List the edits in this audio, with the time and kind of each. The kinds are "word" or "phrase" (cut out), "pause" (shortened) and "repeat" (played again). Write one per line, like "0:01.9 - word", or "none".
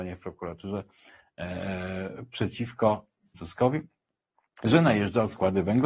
0:03.3 - word